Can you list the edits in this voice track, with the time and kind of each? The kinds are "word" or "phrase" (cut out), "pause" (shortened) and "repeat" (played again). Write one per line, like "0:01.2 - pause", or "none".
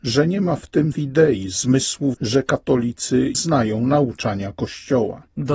0:00.9 - word
0:02.1 - word
0:03.3 - word